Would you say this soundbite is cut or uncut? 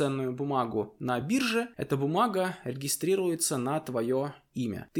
uncut